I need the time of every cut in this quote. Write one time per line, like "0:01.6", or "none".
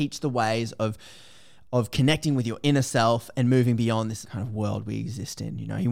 0:04.2

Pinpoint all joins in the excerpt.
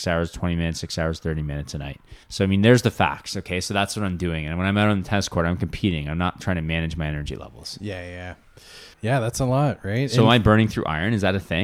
0:02.2
0:08.9

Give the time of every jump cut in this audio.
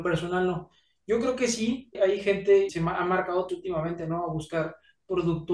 0:01.9
0:02.7
0:03.5

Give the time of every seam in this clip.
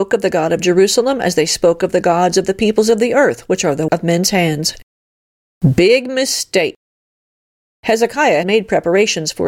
0:03.9
0:08.4

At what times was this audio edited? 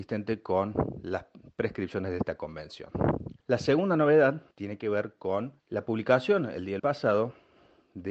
0:03.4
0:04.5
0:05.6
0:06.8

